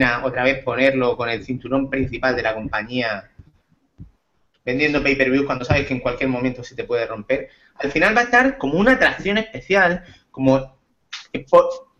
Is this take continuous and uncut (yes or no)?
yes